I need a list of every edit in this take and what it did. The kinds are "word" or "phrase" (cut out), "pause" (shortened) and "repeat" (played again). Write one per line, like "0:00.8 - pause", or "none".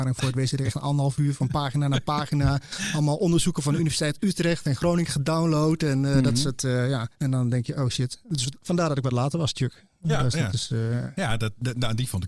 0:07.1 - pause